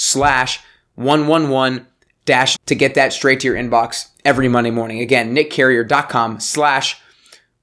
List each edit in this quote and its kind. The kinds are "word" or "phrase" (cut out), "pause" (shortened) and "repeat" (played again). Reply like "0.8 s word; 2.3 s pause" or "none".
2.6 s word